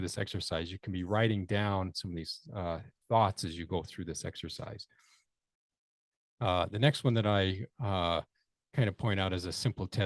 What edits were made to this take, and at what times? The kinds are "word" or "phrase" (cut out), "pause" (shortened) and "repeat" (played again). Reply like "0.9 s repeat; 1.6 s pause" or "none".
none